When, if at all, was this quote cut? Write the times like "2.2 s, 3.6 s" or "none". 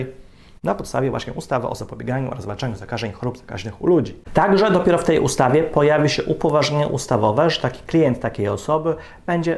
4.2 s